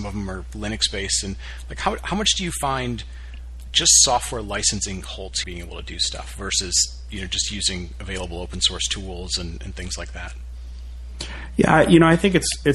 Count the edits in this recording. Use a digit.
1